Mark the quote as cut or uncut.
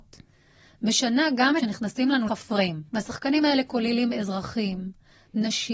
cut